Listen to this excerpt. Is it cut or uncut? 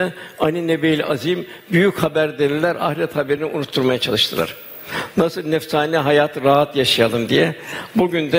uncut